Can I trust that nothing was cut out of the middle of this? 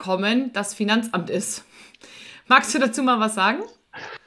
yes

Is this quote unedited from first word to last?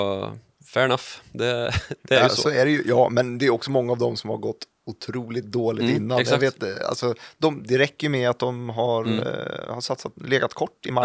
yes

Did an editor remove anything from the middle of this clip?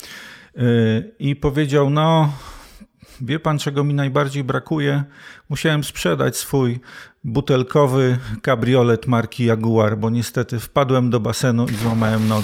no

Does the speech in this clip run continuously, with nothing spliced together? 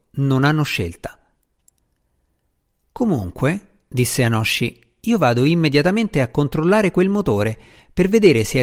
yes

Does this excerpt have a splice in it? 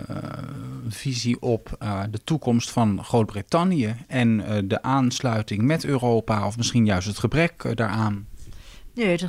no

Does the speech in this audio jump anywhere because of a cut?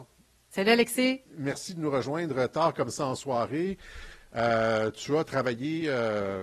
yes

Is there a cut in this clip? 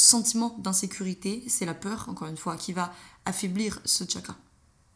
no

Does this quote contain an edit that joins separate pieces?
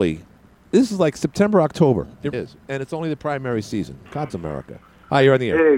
yes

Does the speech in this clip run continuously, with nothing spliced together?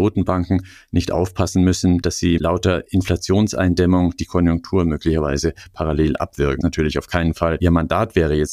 no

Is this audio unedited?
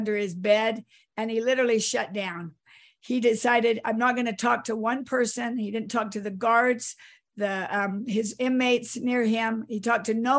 yes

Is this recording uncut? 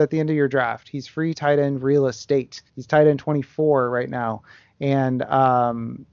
no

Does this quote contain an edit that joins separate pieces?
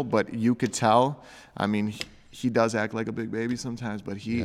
no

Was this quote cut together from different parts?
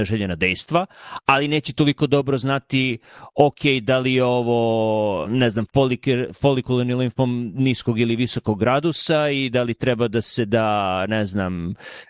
yes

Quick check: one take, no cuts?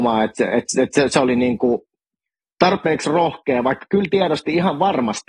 yes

